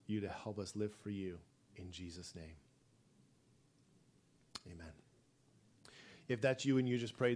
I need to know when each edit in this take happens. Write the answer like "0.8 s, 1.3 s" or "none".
1.5 s